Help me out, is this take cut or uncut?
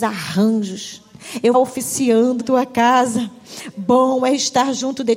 cut